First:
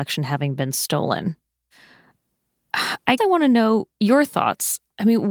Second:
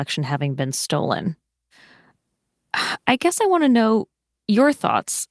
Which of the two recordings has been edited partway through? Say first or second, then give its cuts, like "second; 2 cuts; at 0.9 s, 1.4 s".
first; 2 cuts; at 3.2 s, 3.9 s